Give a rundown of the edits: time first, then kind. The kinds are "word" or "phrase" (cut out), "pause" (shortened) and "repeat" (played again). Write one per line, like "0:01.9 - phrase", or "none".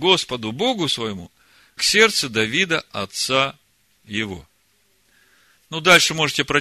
0:01.8 - word